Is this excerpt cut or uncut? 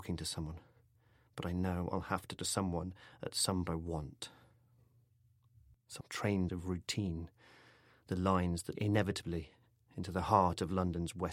cut